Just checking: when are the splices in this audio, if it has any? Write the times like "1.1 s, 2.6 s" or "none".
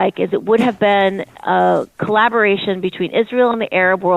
none